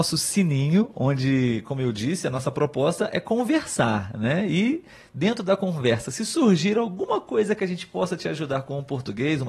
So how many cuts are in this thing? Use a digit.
0